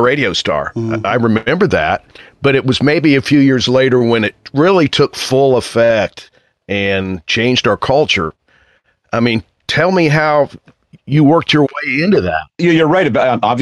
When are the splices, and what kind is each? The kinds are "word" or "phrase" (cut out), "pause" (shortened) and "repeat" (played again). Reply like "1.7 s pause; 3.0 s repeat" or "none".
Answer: none